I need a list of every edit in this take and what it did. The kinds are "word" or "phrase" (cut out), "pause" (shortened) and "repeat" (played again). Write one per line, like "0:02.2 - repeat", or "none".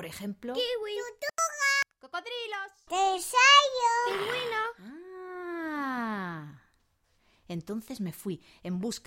none